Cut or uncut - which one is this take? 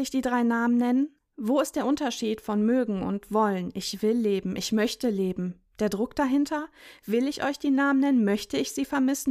uncut